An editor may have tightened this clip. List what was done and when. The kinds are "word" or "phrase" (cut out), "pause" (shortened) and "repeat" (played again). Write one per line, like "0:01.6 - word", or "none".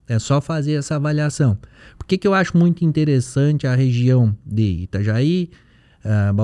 none